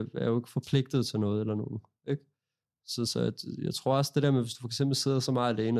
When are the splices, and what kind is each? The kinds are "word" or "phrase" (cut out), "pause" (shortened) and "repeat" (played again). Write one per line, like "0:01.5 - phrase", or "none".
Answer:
none